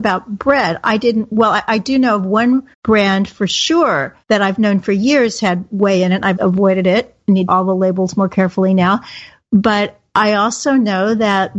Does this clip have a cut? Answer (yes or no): yes